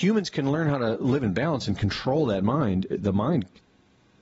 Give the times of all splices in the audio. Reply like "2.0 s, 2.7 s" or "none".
none